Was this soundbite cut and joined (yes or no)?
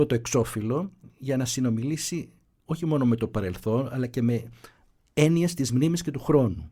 no